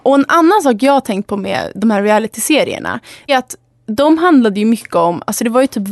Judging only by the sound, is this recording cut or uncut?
cut